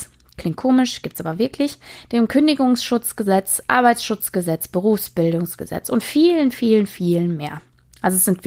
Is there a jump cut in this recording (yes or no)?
no